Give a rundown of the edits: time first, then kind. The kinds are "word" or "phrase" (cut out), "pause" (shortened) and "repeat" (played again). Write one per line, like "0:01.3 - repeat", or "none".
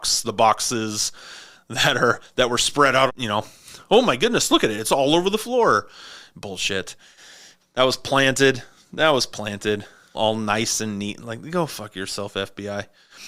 0:03.1 - phrase
0:10.1 - word